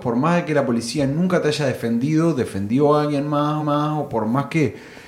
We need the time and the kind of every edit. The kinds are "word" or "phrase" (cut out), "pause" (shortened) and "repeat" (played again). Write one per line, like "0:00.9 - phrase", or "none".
0:03.6 - repeat